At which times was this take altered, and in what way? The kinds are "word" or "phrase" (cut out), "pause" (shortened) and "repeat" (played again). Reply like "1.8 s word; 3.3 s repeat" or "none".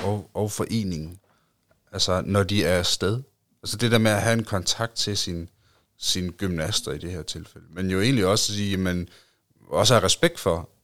none

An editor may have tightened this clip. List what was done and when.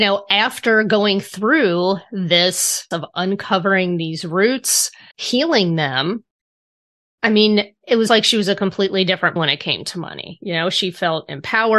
2.9 s word; 5.1 s word; 8.1 s word; 9.4 s word

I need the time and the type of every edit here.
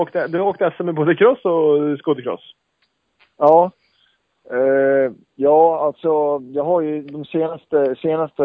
5.2 s pause

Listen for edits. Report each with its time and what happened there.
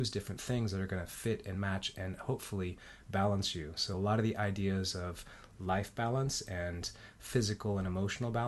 none

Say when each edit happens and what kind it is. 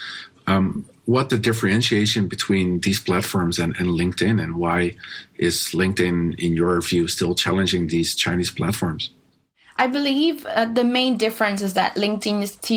1.3 s phrase

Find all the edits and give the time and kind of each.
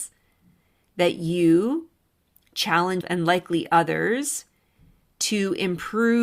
3.0 s word

